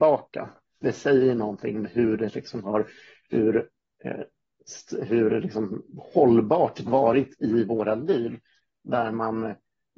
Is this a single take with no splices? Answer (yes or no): no